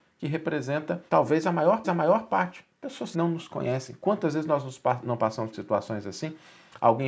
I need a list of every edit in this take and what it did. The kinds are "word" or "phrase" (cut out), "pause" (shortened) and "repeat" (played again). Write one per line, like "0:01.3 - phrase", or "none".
0:01.1 - pause
0:01.8 - repeat
0:03.1 - word
0:05.5 - word